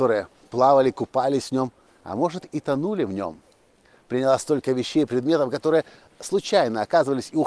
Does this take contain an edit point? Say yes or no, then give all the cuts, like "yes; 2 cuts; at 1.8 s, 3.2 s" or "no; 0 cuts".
no; 0 cuts